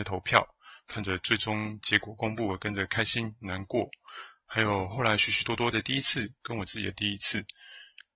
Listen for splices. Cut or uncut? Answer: cut